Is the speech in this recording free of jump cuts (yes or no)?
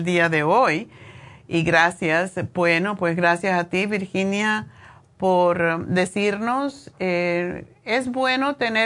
yes